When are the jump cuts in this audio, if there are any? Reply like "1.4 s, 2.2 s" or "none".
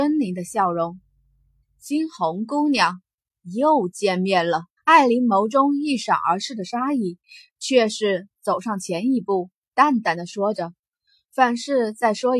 4.8 s

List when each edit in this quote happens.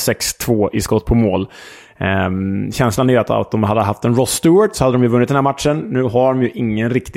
none

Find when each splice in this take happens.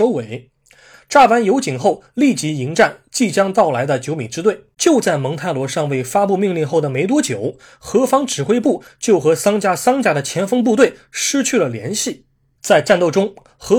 4.7 s

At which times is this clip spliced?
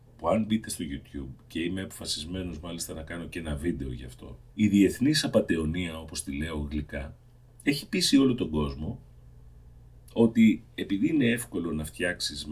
4.5 s, 7.4 s

